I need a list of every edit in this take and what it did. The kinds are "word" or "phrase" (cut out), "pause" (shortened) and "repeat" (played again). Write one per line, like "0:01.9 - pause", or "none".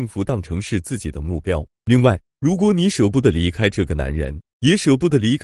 0:01.7 - pause

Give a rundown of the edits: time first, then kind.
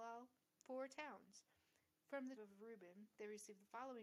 0:02.4 - word

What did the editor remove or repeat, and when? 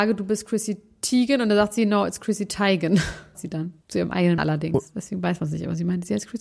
0:03.3 - word
0:03.8 - pause
0:04.4 - word

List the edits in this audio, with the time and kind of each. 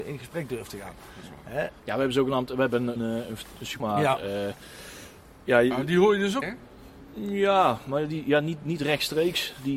0:01.8 - word
0:03.0 - word
0:03.8 - word
0:06.4 - word

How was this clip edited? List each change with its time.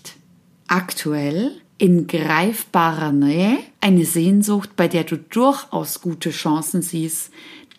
0:01.7 - pause
0:03.7 - pause

